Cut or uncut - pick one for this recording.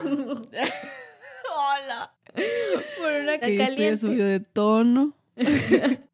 cut